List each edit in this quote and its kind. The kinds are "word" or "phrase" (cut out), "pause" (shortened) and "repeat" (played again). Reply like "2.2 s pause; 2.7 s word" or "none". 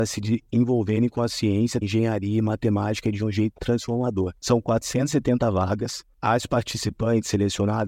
1.8 s word; 4.4 s pause

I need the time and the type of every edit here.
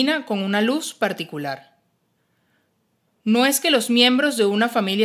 none

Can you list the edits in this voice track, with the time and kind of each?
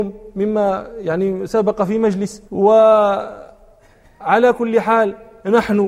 2.5 s pause

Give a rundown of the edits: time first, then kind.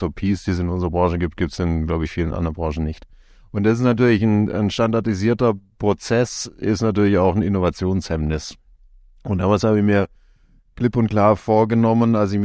none

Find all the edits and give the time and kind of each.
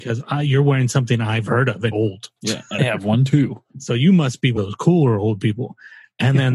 1.9 s word; 2.4 s pause; 2.8 s word; 3.7 s pause; 4.6 s word

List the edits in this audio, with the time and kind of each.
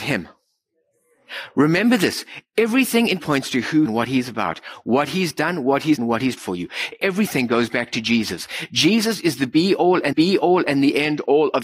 3.2 s word; 3.9 s phrase; 6.0 s word; 6.4 s word; 10.1 s repeat

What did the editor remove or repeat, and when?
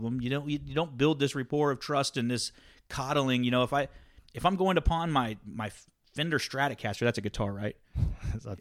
none

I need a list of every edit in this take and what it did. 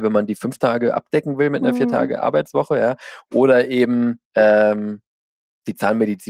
4.2 s pause

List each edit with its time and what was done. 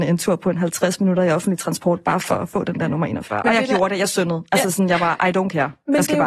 none

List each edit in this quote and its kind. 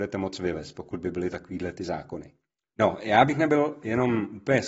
none

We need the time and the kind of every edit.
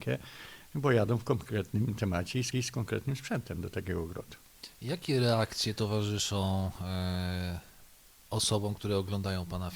2.5 s repeat

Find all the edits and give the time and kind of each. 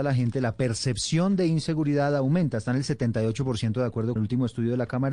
4.2 s word

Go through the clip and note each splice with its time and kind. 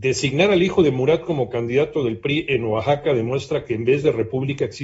none

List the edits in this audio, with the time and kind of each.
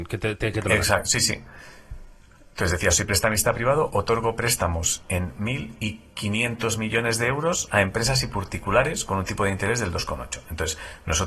none

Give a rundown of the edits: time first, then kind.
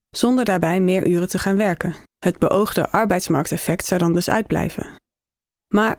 2.1 s pause

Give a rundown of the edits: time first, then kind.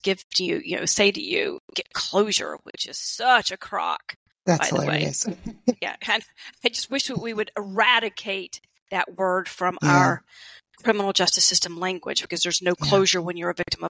none

